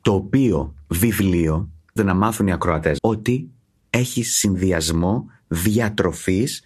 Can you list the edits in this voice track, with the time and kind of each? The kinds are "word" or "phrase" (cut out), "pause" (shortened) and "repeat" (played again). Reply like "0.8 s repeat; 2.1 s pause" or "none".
2.0 s word; 3.0 s word